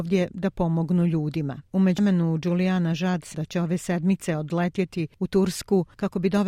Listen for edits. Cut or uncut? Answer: cut